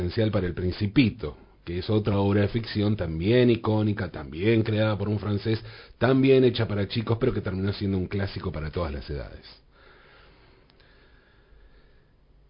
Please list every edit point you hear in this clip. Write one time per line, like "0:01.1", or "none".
none